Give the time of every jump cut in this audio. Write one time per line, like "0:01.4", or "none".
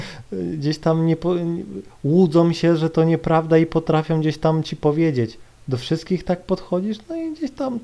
none